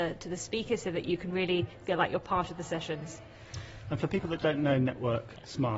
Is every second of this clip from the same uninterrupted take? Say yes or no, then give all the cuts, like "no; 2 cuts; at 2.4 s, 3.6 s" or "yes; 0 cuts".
yes; 0 cuts